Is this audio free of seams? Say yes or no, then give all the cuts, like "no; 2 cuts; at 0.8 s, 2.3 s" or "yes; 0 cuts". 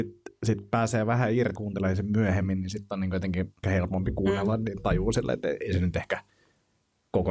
no; 3 cuts; at 1.6 s, 3.6 s, 4.8 s